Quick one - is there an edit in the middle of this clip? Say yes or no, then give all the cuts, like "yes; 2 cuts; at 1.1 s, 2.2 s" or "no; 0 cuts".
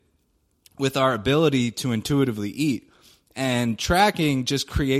no; 0 cuts